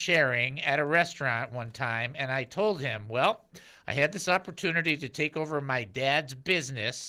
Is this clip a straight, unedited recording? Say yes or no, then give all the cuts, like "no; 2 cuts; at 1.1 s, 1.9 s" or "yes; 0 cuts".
yes; 0 cuts